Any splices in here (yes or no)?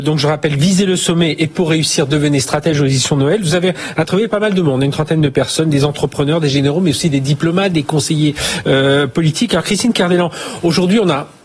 no